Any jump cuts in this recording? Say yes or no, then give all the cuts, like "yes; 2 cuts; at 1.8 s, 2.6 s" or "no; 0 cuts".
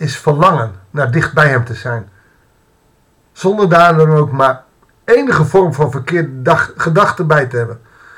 no; 0 cuts